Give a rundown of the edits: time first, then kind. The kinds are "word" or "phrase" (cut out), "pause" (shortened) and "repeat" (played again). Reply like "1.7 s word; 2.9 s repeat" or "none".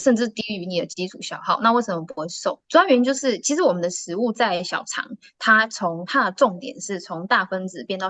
2.6 s pause